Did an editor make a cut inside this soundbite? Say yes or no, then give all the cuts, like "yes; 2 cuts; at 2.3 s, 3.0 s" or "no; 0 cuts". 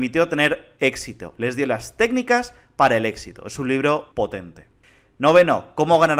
yes; 1 cut; at 4.1 s